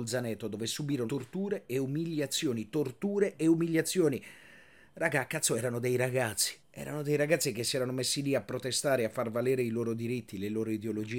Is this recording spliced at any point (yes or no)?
yes